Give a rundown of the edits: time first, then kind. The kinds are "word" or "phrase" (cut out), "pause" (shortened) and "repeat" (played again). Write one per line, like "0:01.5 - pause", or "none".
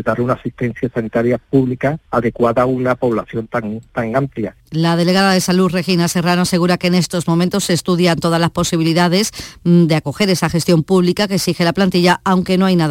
0:04.6 - pause